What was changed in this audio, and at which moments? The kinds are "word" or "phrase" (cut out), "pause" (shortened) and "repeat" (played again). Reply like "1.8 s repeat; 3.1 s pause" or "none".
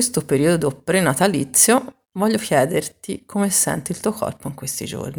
2.0 s pause